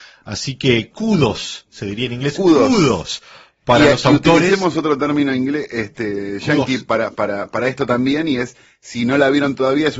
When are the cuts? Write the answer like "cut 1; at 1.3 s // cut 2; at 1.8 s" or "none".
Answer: none